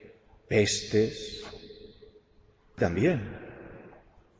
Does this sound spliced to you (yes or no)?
no